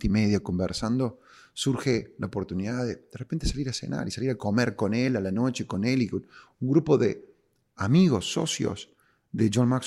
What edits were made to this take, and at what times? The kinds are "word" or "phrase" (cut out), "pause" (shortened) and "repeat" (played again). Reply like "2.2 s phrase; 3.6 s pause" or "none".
none